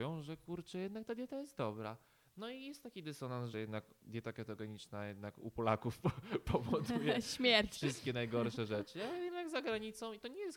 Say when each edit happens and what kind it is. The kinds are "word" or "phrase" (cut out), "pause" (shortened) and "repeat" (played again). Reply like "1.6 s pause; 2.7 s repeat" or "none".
3.5 s phrase